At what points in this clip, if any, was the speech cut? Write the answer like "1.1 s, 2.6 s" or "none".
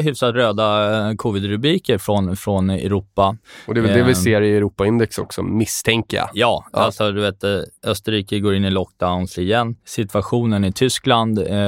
7.8 s, 9.8 s

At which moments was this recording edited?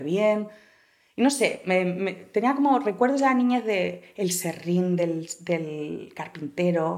none

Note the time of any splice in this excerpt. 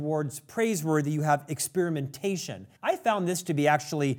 2.8 s

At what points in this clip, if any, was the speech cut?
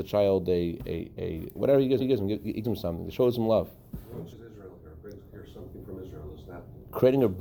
1.6 s, 2.0 s, 2.6 s, 4.3 s

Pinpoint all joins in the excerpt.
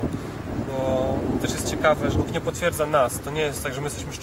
2.1 s

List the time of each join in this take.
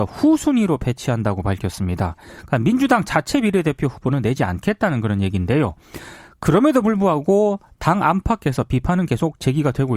none

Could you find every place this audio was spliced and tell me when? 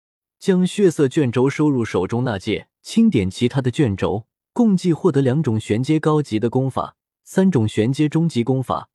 2.7 s, 4.4 s, 7.0 s

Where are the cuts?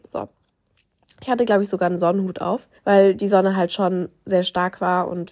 2.8 s

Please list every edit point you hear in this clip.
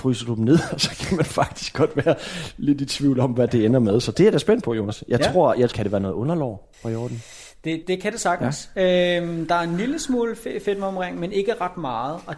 3.5 s, 5.7 s, 6.7 s, 7.8 s

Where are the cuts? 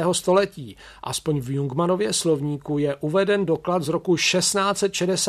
none

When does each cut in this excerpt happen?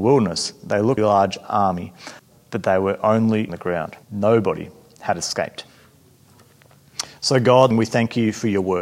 1.0 s, 2.2 s, 3.5 s, 4.0 s, 7.7 s

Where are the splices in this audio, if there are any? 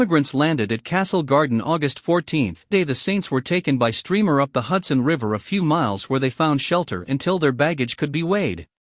2.7 s

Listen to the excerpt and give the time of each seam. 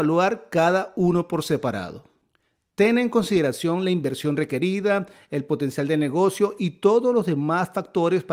none

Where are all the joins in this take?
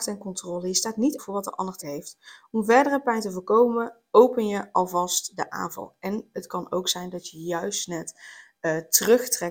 1.2 s, 1.8 s

